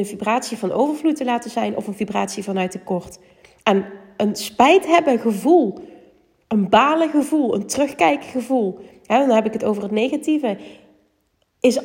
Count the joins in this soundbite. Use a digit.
0